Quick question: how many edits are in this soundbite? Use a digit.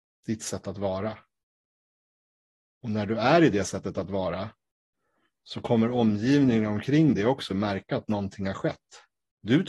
0